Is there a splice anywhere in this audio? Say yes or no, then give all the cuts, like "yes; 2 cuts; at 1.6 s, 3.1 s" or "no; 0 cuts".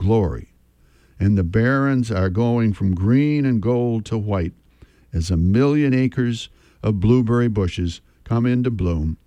no; 0 cuts